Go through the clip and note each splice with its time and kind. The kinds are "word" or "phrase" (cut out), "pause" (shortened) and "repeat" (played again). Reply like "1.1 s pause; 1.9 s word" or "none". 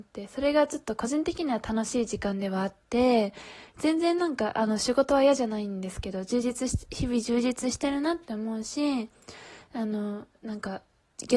10.3 s pause